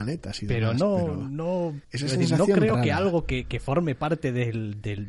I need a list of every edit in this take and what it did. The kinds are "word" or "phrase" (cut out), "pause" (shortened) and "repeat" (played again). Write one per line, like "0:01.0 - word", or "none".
0:01.8 - pause